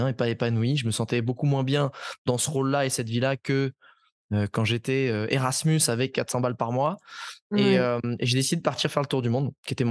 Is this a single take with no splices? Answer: yes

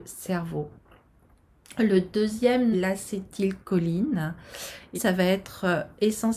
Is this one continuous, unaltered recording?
no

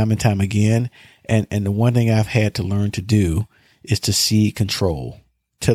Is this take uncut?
yes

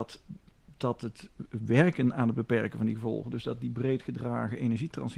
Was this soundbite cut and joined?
no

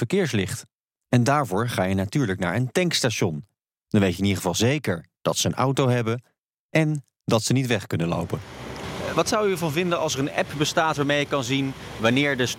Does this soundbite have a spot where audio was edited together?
no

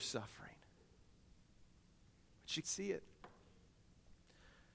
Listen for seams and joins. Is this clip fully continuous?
no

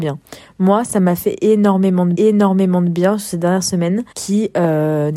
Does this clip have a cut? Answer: yes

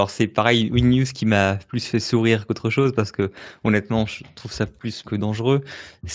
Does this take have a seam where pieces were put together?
yes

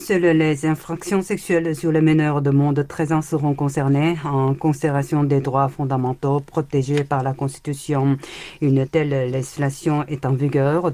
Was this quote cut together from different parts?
no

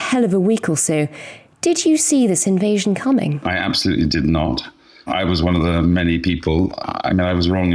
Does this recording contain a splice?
no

